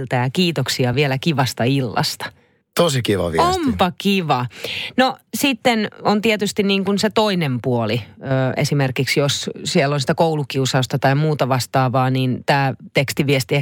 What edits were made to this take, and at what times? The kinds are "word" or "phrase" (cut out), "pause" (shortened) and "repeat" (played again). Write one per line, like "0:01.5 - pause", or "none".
none